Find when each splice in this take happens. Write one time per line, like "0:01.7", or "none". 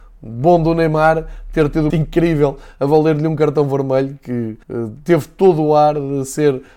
0:01.9
0:04.6

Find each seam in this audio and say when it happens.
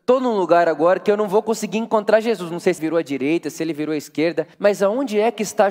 0:02.8
0:04.5

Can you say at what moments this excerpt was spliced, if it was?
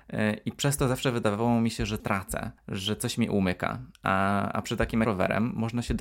0:02.0
0:02.6
0:03.9
0:05.0

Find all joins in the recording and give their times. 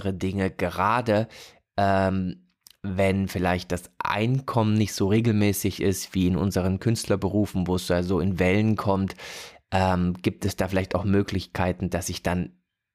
none

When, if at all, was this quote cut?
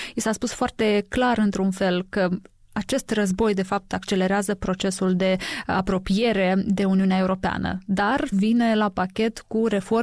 0:08.3

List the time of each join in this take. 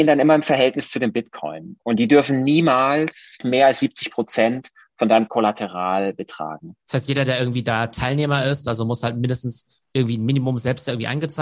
none

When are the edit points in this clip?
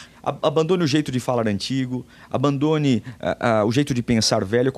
none

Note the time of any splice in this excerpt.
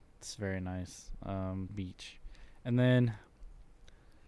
0:01.7

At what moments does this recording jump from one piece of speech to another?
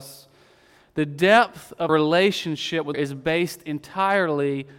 0:01.9
0:02.9

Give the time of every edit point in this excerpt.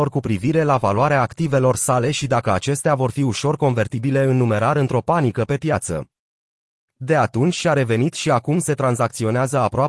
none

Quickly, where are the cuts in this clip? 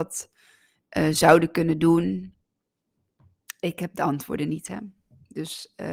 none

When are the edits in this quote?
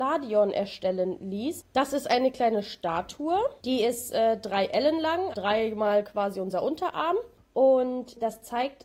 0:05.3

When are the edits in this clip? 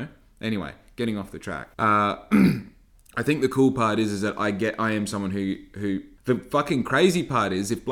0:01.7
0:06.2

